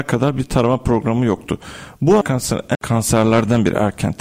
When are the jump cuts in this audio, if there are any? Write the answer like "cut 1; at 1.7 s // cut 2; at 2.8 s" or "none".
cut 1; at 2.2 s // cut 2; at 2.7 s